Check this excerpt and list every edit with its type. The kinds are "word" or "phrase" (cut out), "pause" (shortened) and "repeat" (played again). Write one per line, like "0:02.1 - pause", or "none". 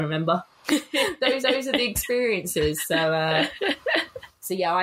0:01.4 - repeat